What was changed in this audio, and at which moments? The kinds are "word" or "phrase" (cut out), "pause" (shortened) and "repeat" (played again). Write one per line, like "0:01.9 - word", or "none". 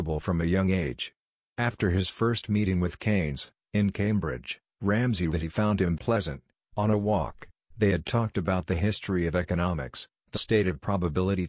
0:05.3 - word
0:05.9 - word
0:10.3 - word